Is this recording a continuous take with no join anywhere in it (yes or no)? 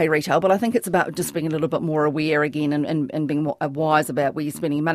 yes